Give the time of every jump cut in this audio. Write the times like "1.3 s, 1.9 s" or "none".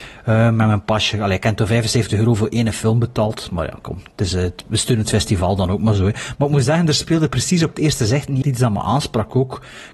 8.4 s

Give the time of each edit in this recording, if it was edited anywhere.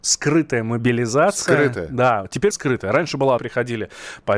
2.5 s, 3.4 s

